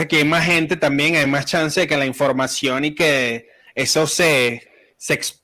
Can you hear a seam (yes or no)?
no